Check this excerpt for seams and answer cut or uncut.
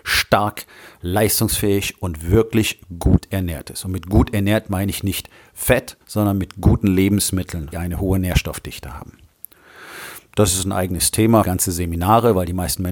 cut